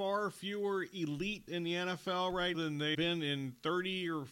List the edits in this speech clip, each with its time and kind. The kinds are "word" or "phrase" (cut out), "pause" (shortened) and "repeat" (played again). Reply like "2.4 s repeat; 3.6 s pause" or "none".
1.5 s word; 2.5 s word; 2.9 s word